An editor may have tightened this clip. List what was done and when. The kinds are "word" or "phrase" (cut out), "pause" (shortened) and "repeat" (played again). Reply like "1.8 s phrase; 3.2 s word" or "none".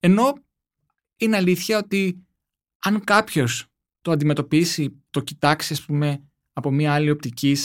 none